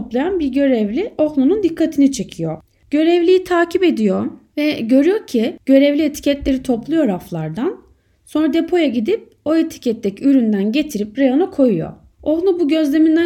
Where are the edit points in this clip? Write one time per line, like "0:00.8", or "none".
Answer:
none